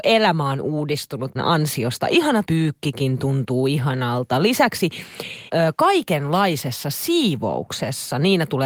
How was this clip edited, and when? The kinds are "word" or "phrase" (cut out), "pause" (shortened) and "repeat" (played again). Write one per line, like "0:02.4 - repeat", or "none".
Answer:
0:01.4 - word
0:02.5 - word
0:05.5 - word